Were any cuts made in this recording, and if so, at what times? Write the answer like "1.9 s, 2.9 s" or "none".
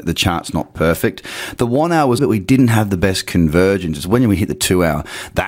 2.2 s